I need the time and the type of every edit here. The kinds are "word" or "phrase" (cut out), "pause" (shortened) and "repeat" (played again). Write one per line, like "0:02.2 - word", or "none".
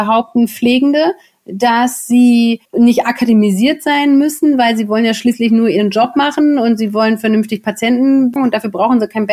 0:02.7 - pause
0:08.4 - word